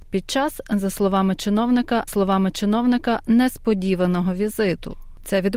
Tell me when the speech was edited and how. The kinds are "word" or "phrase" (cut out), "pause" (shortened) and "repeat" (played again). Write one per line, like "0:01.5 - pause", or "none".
0:02.1 - repeat